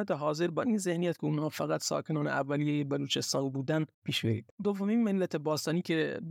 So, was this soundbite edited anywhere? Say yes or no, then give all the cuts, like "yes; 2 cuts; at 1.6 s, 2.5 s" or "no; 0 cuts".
yes; 1 cut; at 3.9 s